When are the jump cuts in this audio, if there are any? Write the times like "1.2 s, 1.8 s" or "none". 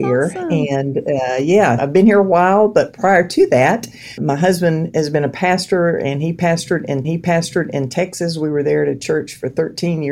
1.8 s, 4.2 s, 7.0 s